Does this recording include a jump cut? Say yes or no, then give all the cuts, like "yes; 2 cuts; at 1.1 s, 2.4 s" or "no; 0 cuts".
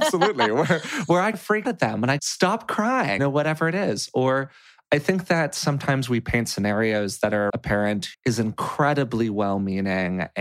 yes; 6 cuts; at 1.3 s, 1.6 s, 2.2 s, 3.2 s, 7.5 s, 8.1 s